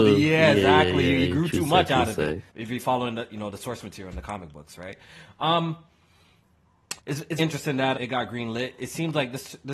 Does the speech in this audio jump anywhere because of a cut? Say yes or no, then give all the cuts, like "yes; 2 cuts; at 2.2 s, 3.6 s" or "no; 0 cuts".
yes; 4 cuts; at 2.5 s, 7.0 s, 7.4 s, 7.9 s